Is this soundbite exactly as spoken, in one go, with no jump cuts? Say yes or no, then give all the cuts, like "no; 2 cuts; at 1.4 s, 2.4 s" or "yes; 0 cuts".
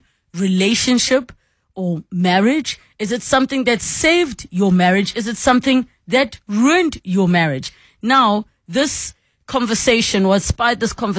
yes; 0 cuts